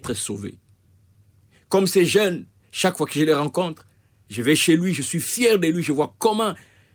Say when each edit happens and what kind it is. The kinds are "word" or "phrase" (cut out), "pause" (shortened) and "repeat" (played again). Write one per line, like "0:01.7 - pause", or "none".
none